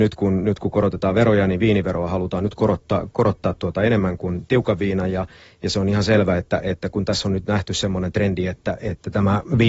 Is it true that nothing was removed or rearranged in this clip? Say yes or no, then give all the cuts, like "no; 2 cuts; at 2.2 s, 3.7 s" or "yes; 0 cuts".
yes; 0 cuts